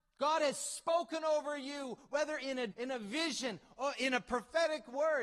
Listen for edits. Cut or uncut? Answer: cut